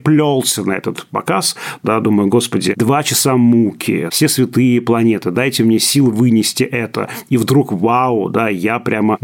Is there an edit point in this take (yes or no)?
no